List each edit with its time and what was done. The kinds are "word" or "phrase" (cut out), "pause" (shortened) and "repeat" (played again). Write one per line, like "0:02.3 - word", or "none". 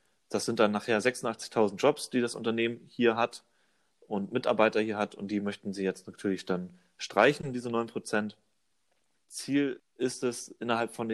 none